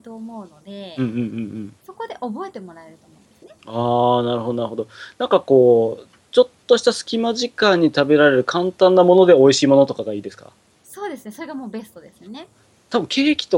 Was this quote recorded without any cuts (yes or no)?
no